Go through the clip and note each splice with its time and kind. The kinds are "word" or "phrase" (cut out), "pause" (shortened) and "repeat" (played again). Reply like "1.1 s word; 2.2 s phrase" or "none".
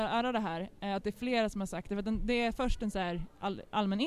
none